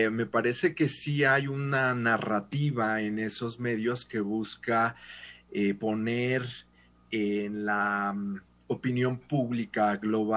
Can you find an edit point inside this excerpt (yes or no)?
no